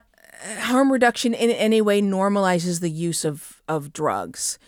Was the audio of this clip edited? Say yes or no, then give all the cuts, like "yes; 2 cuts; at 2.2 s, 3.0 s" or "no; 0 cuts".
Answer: no; 0 cuts